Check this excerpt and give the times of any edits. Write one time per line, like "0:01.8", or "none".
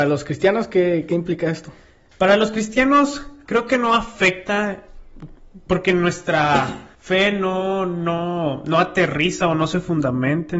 0:03.5
0:06.9